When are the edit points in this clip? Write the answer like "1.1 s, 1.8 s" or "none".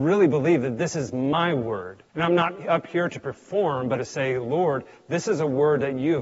2.1 s, 4.0 s